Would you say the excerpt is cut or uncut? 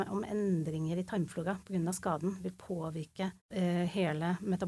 cut